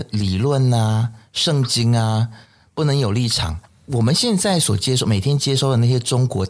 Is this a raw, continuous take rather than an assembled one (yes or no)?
yes